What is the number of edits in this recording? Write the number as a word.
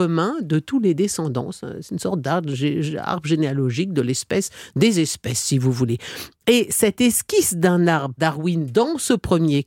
one